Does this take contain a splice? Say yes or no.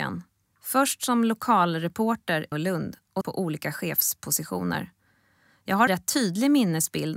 yes